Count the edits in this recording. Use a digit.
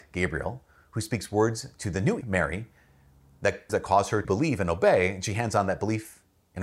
3